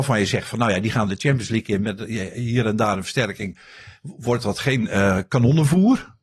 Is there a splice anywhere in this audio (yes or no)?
no